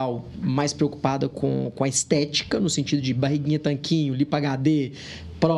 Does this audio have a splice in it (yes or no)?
no